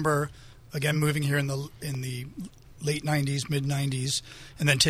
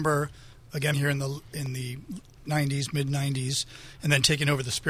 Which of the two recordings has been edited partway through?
second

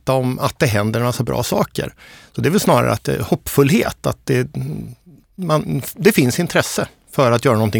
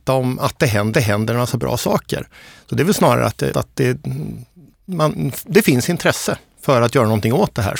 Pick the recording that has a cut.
second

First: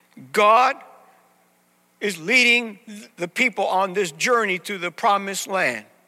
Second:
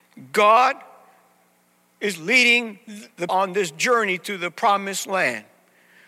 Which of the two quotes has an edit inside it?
second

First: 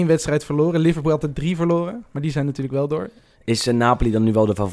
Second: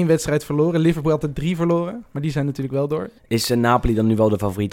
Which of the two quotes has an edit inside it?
second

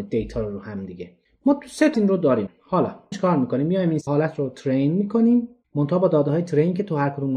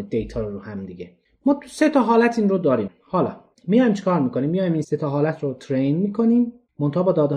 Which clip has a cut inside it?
first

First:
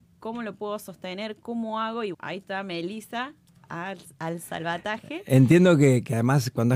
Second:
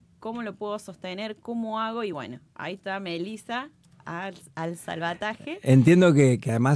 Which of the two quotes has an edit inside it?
first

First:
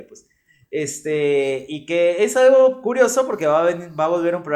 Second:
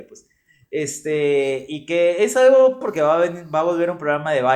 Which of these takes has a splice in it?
second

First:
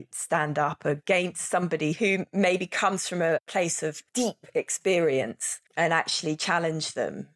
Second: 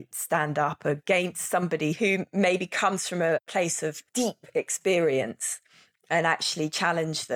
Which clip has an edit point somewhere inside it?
first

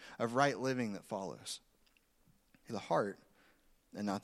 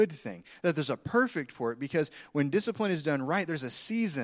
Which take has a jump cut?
first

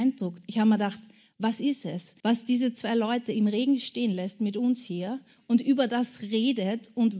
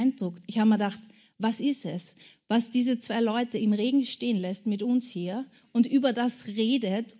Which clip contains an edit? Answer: first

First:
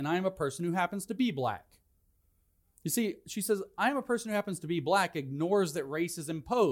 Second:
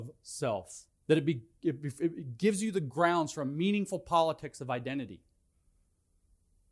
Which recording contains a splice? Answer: second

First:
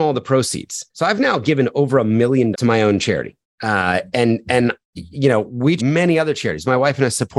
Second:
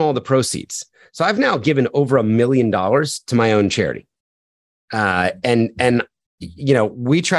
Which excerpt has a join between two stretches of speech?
first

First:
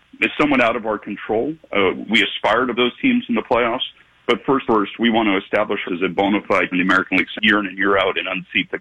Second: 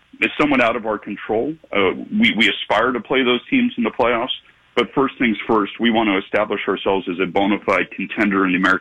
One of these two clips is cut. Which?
first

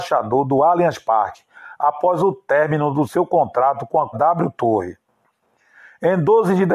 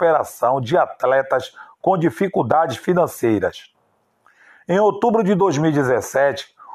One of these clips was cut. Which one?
first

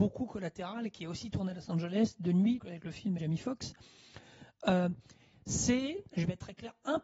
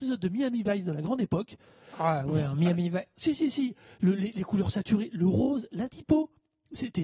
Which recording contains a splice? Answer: first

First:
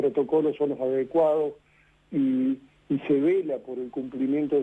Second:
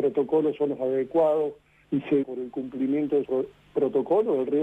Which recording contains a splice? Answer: second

